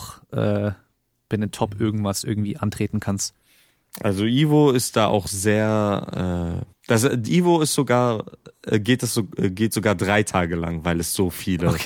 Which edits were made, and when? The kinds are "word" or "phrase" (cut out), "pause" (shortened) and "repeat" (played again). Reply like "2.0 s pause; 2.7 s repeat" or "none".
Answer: 6.7 s pause